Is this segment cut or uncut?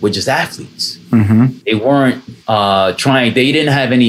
cut